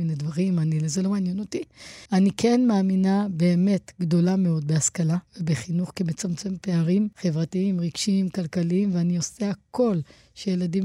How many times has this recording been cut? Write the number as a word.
three